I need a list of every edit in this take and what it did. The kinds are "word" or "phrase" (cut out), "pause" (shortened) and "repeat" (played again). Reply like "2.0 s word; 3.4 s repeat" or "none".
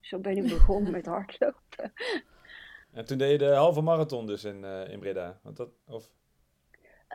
2.8 s pause